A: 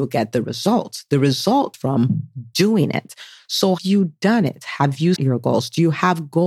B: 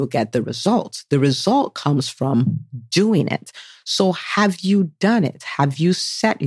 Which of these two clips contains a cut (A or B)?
A